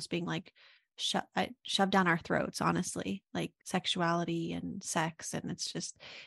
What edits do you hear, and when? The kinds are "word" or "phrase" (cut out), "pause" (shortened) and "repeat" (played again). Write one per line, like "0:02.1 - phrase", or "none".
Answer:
0:03.6 - pause